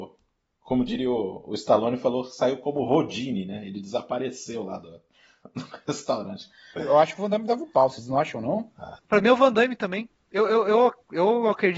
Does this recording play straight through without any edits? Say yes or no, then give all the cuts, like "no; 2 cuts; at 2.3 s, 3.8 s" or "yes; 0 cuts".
yes; 0 cuts